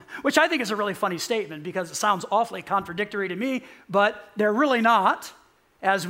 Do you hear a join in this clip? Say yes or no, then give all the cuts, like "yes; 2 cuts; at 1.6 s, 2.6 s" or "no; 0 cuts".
no; 0 cuts